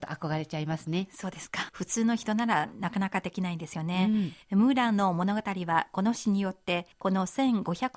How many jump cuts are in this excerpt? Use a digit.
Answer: 3